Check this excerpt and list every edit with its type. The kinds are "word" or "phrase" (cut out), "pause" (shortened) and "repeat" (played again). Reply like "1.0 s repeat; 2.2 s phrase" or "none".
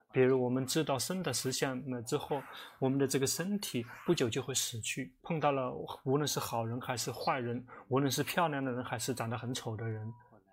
5.2 s pause